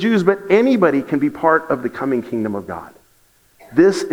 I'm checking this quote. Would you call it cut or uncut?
uncut